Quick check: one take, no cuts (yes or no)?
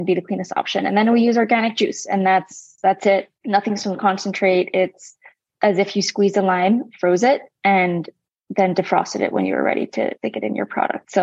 yes